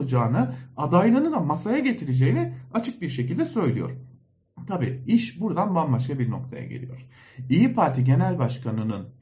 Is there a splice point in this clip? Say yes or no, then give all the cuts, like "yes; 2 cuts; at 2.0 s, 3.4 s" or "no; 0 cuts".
no; 0 cuts